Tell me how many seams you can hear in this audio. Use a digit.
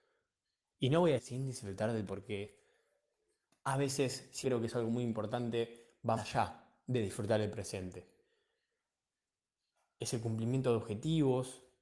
4